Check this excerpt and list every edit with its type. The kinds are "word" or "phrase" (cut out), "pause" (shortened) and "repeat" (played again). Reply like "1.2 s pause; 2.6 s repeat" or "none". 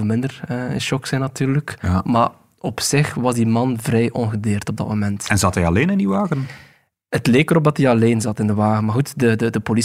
none